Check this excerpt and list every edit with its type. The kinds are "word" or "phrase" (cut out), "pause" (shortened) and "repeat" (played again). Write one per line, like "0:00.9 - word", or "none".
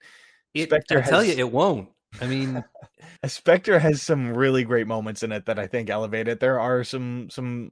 0:03.2 - pause